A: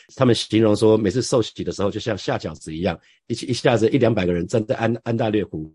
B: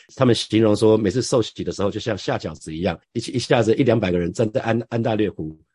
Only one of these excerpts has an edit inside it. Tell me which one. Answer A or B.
B